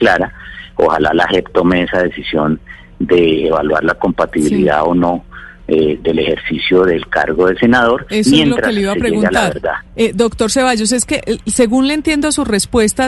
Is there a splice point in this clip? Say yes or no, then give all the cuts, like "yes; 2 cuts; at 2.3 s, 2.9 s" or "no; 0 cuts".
yes; 1 cut; at 9.9 s